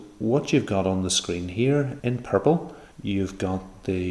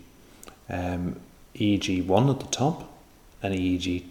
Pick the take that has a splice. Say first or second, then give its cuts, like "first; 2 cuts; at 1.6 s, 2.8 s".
first; 2 cuts; at 2.0 s, 2.9 s